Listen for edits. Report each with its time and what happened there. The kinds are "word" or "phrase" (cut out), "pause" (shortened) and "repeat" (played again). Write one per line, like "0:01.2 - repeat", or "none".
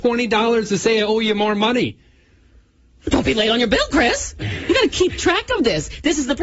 none